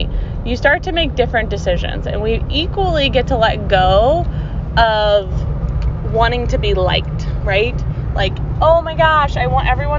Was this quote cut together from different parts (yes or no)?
no